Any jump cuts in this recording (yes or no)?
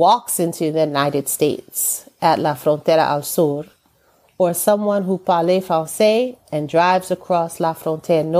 no